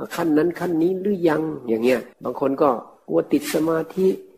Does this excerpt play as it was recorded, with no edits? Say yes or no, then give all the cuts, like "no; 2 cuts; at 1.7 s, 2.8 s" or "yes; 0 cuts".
no; 1 cut; at 2.1 s